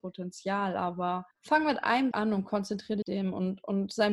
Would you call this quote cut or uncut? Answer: cut